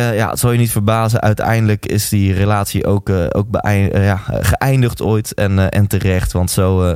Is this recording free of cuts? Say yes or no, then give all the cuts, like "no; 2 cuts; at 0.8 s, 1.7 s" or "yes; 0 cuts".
yes; 0 cuts